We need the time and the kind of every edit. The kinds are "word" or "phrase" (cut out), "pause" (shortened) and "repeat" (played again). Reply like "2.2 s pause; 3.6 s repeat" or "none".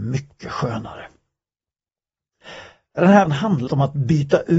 3.3 s word; 3.7 s word